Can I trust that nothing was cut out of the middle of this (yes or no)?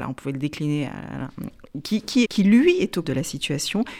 no